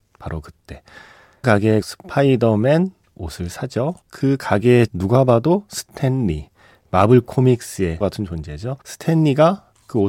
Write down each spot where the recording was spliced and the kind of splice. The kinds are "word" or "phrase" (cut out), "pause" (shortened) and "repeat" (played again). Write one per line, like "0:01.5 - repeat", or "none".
0:01.4 - word
0:01.8 - word
0:04.0 - pause
0:04.9 - word
0:08.0 - word
0:08.8 - pause